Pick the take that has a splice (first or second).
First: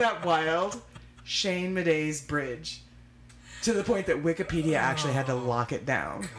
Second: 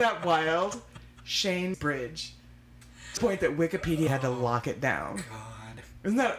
second